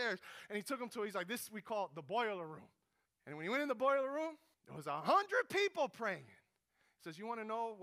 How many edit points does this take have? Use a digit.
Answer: 2